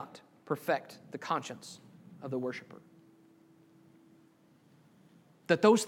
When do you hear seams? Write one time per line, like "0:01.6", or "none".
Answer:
none